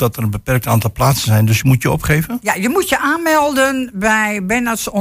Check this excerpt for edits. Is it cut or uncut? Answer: uncut